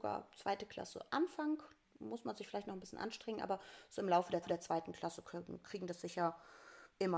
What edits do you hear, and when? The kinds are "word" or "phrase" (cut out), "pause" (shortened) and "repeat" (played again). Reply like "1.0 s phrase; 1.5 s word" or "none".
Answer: 4.4 s repeat